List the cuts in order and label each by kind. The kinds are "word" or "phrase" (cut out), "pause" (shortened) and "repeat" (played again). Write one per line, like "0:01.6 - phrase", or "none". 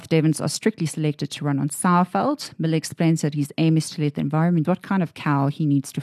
0:04.6 - word